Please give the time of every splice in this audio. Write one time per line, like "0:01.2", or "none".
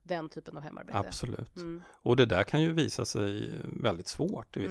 none